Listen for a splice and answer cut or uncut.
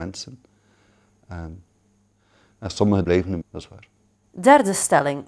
cut